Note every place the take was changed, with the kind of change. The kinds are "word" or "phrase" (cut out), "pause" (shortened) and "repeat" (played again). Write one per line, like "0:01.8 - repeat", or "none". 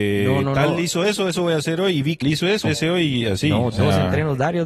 0:02.2 - word
0:02.6 - phrase

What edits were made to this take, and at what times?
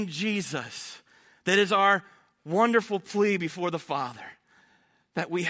none

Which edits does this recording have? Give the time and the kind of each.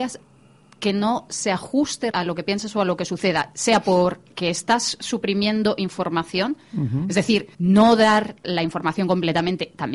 0:02.1 - word
0:07.5 - pause

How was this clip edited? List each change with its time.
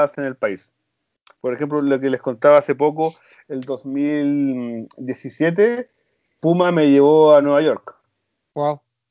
none

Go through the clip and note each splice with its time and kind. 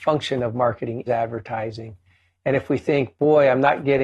0:01.1 - word

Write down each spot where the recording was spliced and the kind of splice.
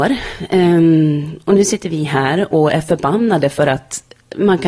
none

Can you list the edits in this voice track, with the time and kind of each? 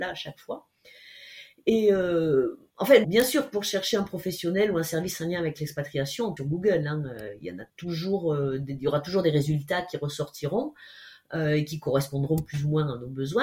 0:02.7 - pause
0:03.0 - word
0:06.4 - phrase
0:07.7 - pause

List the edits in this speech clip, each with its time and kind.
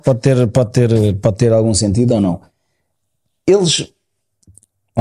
none

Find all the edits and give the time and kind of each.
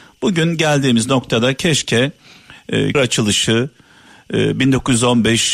0:02.9 - word

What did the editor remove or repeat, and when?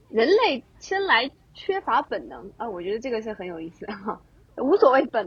none

